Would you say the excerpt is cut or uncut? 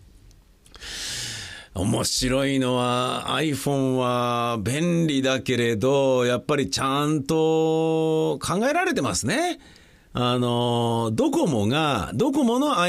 uncut